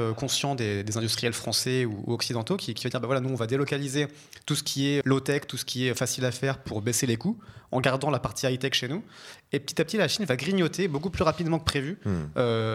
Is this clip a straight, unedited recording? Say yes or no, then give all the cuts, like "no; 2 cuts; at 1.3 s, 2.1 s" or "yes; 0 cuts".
no; 1 cut; at 5.0 s